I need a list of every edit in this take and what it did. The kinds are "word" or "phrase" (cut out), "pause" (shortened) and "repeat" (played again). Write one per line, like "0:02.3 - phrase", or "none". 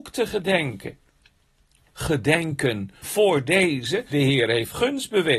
0:01.9 - word
0:03.0 - word
0:04.1 - word